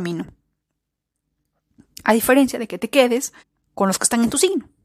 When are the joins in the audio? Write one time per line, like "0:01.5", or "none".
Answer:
0:03.4